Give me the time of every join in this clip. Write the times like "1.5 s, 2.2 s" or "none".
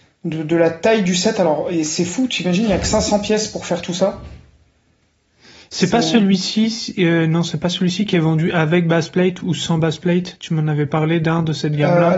none